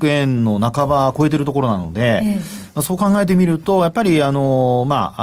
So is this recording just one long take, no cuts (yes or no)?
yes